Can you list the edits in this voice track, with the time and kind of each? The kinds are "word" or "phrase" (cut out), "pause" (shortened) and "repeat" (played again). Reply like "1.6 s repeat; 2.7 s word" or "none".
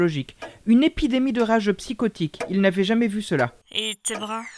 3.6 s pause